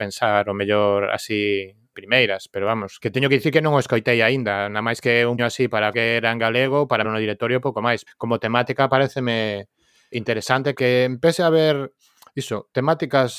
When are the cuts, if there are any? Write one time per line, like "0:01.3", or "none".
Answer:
0:01.9
0:02.5
0:03.0
0:05.4
0:05.9
0:07.0
0:08.1
0:10.1
0:10.7

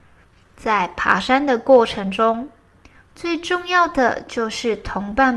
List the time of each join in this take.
none

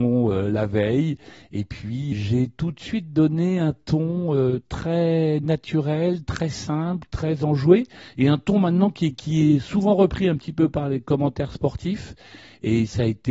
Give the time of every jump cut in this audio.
0:02.1

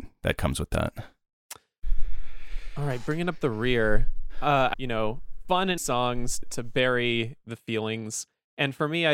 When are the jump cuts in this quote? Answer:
0:04.7
0:05.8
0:06.4

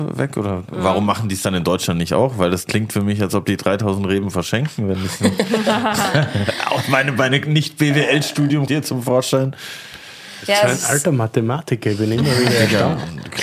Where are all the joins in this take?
0:08.7

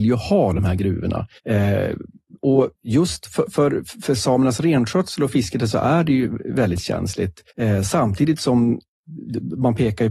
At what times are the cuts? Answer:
0:01.4
0:02.7
0:07.5

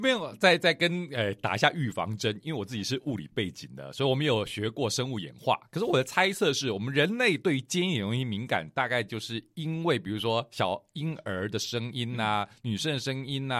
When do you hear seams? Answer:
none

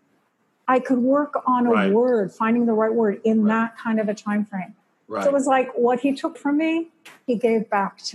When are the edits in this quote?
0:06.3

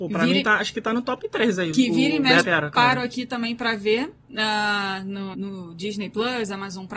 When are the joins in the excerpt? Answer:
0:02.4
0:05.3

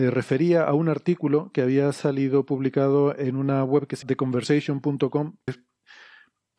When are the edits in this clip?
0:04.0
0:05.5

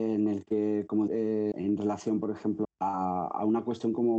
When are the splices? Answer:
0:01.1
0:01.5
0:02.6

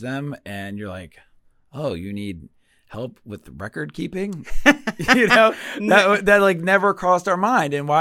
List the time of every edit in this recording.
none

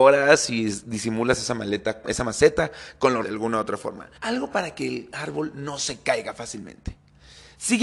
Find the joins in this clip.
0:02.0
0:03.2
0:04.2

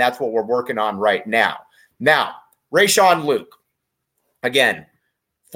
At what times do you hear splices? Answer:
none

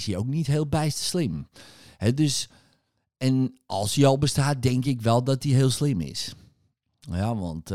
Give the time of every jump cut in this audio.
none

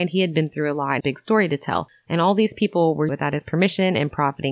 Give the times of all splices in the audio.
0:01.0
0:03.1

